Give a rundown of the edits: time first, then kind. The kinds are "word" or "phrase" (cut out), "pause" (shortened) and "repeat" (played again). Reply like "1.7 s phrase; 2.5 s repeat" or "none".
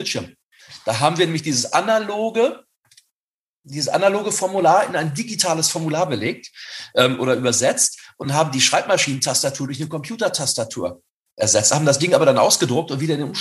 none